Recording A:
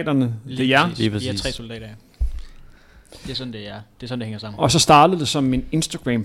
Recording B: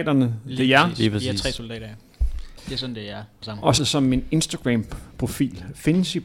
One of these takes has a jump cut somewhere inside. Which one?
B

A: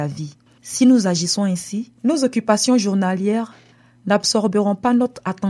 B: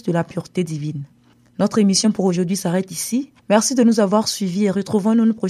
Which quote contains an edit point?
A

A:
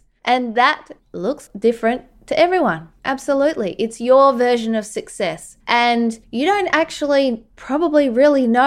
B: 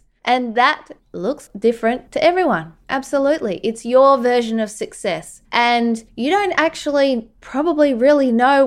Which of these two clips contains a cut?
B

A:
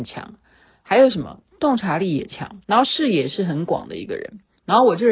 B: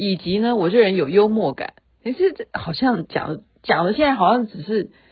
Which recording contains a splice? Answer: A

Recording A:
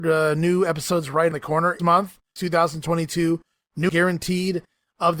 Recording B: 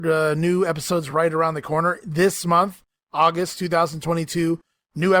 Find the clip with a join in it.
A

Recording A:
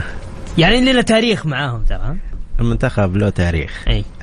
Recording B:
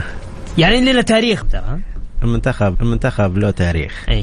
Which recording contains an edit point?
B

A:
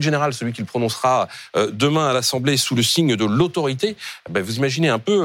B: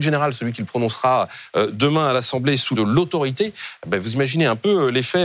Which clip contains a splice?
B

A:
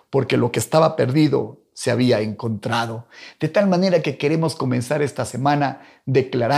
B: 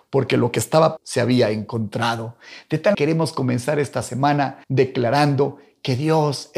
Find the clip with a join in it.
B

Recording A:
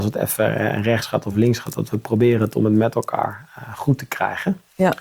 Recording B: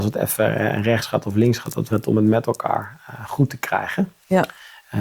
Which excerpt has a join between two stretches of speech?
B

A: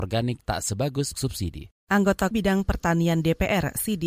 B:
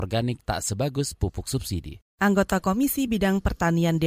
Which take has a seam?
A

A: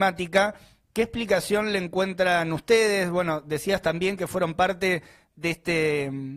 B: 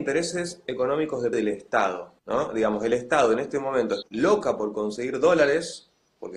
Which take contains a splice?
B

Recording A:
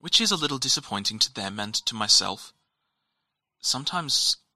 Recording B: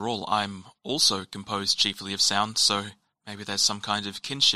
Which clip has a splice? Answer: B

